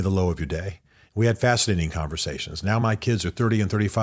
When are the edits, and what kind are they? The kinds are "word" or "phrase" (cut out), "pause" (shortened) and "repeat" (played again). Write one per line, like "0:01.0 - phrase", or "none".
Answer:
none